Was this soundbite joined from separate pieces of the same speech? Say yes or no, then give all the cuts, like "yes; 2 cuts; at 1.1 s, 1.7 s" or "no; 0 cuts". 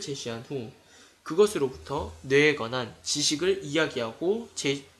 no; 0 cuts